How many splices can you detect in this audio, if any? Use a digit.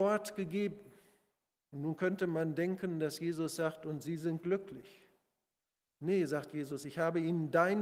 1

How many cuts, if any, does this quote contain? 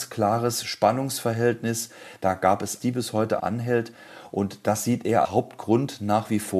3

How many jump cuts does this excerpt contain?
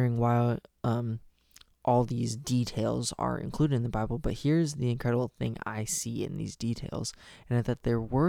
0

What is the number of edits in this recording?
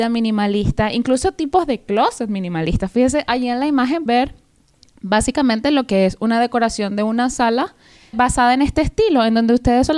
2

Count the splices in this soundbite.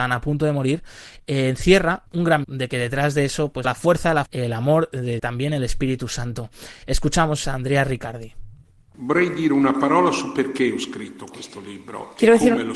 6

